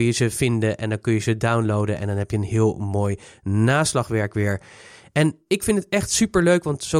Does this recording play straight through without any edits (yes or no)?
yes